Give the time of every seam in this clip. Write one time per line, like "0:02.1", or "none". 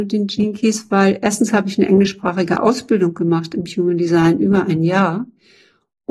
none